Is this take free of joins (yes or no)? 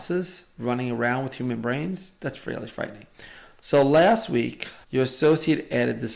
no